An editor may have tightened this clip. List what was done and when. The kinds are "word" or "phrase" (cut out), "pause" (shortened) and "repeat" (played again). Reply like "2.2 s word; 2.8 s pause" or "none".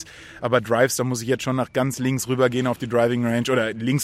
none